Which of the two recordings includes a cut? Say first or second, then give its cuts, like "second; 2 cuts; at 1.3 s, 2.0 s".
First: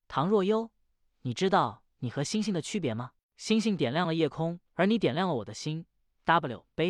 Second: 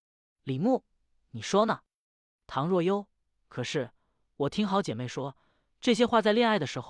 first; 2 cuts; at 3.2 s, 4.7 s